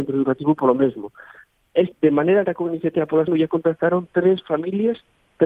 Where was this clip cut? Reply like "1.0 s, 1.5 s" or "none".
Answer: 1.9 s, 2.5 s, 3.3 s